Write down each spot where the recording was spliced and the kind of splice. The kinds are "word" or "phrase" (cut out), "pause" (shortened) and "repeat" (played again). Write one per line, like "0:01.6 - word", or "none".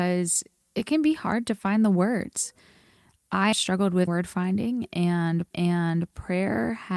0:03.5 - word
0:04.1 - phrase
0:05.5 - repeat